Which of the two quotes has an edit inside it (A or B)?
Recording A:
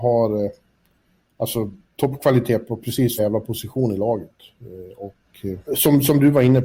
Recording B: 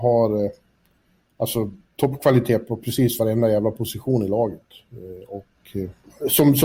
A